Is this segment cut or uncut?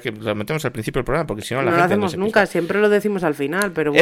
uncut